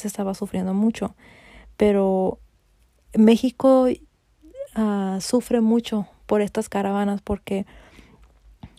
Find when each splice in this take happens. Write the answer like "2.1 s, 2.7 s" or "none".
none